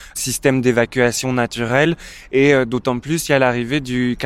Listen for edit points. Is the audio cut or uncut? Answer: uncut